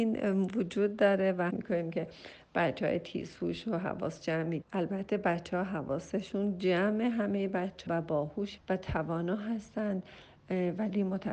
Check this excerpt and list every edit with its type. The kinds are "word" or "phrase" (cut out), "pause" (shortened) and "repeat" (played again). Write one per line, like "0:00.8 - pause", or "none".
0:01.5 - phrase
0:04.6 - word
0:07.9 - word
0:08.6 - word